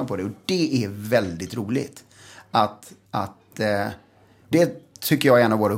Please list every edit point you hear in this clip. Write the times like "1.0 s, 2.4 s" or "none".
4.5 s